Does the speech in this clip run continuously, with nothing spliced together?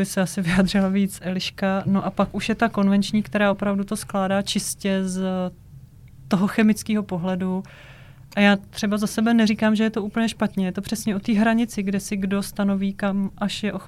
yes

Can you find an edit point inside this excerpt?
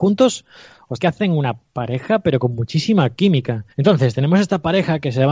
yes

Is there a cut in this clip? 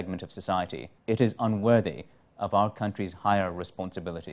yes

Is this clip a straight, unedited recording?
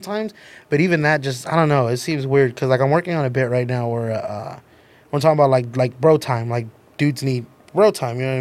yes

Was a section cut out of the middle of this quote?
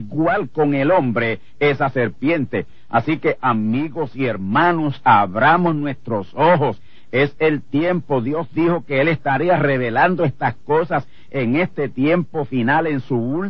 no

